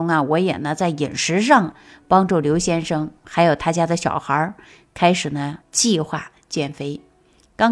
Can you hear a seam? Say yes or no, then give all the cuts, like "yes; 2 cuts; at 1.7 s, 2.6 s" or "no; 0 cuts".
no; 0 cuts